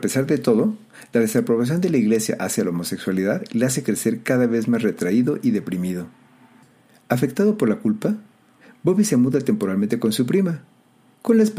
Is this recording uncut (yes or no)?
yes